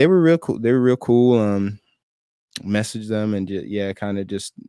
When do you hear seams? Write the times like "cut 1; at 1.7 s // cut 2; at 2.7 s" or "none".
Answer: none